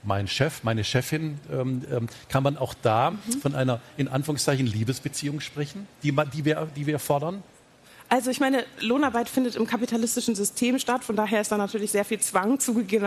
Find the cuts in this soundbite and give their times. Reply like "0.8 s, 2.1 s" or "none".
none